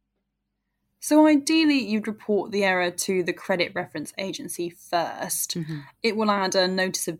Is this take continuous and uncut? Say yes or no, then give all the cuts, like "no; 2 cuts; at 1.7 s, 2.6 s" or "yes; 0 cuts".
yes; 0 cuts